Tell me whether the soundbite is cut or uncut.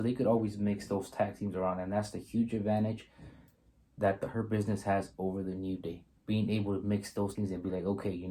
cut